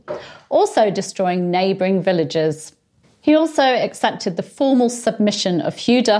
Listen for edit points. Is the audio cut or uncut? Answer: uncut